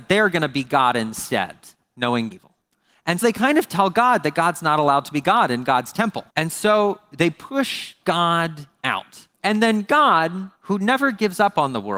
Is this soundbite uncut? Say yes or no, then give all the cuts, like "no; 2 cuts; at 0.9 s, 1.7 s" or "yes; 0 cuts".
no; 5 cuts; at 2.3 s, 3.2 s, 6.3 s, 9.3 s, 10.5 s